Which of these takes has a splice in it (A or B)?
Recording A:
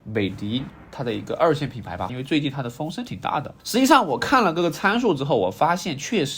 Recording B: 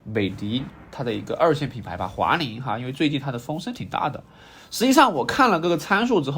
A